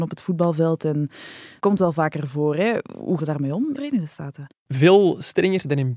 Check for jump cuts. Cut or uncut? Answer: cut